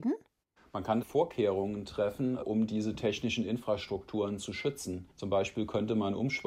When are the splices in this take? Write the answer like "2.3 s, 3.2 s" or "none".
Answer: 5.1 s